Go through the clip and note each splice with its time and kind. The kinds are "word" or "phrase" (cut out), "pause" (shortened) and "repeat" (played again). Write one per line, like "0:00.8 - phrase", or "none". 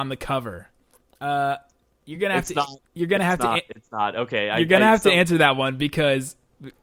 none